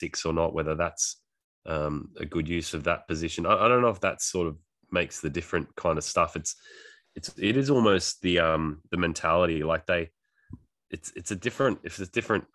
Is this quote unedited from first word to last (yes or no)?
yes